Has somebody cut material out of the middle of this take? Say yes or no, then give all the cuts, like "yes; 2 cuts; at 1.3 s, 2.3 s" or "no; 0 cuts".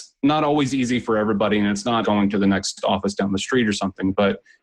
yes; 1 cut; at 2.0 s